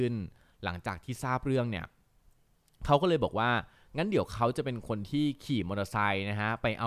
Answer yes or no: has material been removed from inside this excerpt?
no